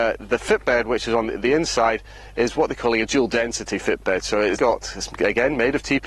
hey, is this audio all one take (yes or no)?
no